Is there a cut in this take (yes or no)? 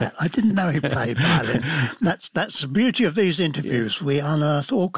no